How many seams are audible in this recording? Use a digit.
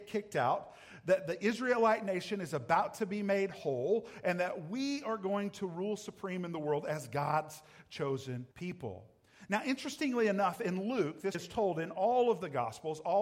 2